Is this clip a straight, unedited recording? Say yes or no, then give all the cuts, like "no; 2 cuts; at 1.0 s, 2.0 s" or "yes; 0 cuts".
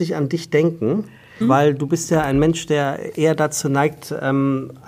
no; 1 cut; at 1.4 s